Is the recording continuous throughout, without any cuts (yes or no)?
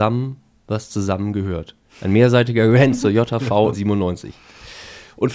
no